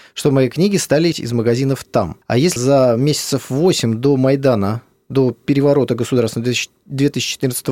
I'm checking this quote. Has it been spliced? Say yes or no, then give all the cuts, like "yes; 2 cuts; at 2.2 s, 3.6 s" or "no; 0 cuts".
yes; 3 cuts; at 1.1 s, 2.2 s, 2.6 s